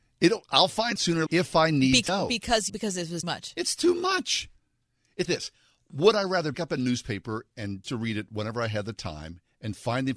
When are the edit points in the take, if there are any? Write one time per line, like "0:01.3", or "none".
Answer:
0:01.0
0:01.3
0:02.1
0:02.7
0:03.2
0:05.3
0:06.5
0:07.8